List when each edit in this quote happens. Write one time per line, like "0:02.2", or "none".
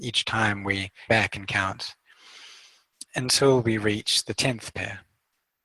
0:01.1